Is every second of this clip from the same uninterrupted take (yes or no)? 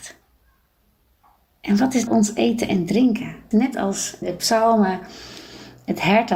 no